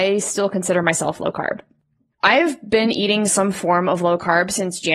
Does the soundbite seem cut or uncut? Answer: uncut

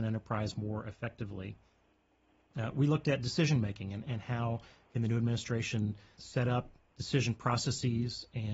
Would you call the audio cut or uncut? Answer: cut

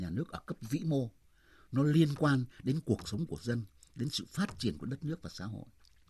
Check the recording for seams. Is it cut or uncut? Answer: uncut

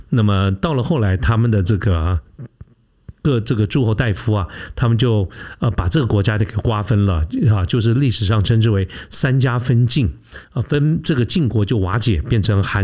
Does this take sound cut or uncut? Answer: cut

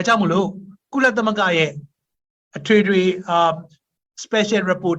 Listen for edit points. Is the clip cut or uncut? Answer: uncut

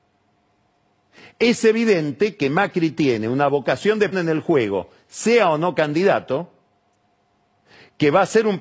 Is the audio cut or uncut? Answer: cut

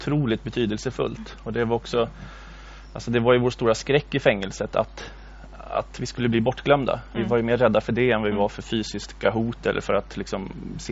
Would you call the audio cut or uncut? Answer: uncut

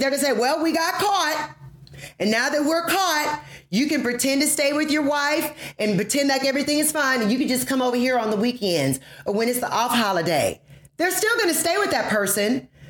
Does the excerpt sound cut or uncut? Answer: uncut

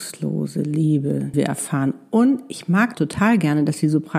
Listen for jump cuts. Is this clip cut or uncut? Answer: cut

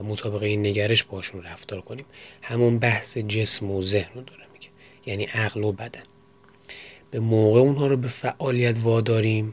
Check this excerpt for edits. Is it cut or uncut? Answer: uncut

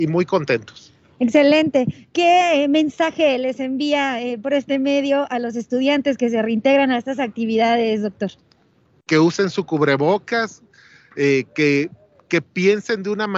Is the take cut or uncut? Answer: uncut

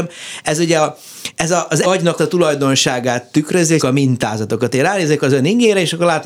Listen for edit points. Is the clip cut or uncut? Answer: cut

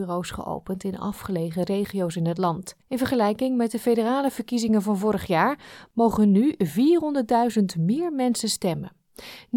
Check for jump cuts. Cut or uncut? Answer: cut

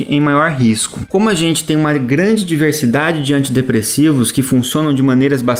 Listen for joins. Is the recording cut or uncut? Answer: uncut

